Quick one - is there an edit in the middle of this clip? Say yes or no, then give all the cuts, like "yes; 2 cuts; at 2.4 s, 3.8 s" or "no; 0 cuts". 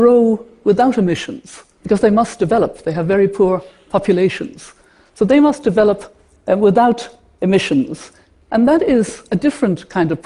no; 0 cuts